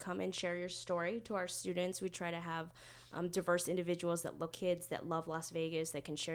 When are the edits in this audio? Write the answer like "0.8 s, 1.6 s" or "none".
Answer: 4.5 s